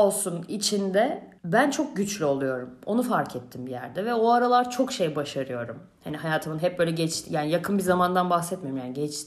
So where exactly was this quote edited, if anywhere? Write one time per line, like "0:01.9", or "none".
0:01.4